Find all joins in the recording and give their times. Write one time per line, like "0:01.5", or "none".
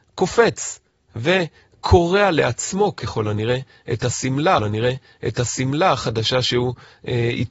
0:04.6